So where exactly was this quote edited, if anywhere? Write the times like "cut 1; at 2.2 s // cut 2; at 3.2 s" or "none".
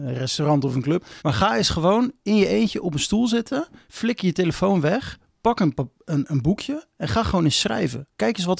cut 1; at 1.2 s